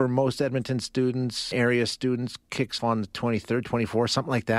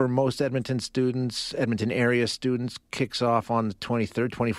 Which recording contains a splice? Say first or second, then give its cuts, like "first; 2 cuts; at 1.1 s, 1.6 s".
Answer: first; 2 cuts; at 1.5 s, 2.8 s